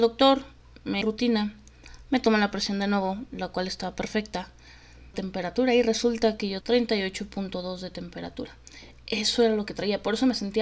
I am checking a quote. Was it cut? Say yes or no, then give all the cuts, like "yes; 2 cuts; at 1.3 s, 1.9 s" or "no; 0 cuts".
yes; 3 cuts; at 1.0 s, 5.1 s, 6.6 s